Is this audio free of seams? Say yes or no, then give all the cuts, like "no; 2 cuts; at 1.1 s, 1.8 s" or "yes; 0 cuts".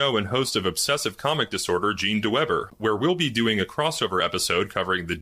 yes; 0 cuts